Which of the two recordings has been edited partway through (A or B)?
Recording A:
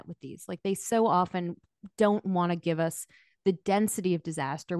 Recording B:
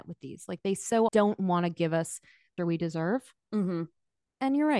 B